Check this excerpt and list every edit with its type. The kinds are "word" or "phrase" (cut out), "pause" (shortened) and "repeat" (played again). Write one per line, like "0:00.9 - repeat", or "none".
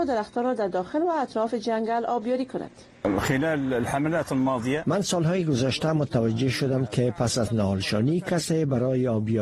none